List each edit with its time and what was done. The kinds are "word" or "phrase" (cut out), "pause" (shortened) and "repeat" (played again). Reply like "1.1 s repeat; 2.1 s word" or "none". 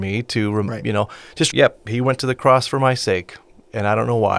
1.5 s phrase